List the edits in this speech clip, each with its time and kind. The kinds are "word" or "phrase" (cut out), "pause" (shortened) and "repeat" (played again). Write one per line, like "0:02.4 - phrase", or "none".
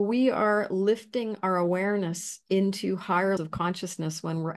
0:03.4 - word